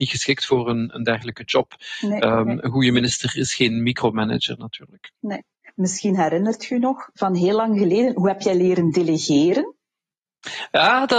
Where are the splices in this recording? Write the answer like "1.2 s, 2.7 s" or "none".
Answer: none